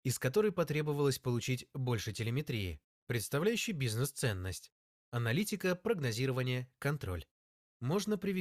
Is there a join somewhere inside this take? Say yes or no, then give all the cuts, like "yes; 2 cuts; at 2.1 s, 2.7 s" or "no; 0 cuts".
no; 0 cuts